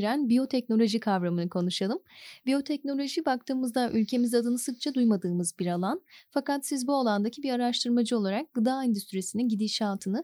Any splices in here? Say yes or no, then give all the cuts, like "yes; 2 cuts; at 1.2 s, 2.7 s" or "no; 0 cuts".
no; 0 cuts